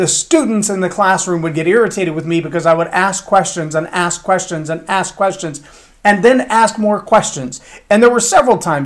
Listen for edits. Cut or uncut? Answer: uncut